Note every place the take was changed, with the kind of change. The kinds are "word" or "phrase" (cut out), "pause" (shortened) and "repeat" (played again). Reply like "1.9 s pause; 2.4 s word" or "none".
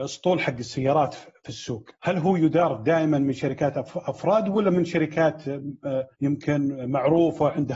1.9 s pause; 6.1 s pause